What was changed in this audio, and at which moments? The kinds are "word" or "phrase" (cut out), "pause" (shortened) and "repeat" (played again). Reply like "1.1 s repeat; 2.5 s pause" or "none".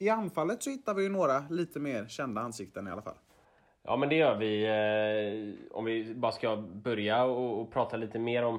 none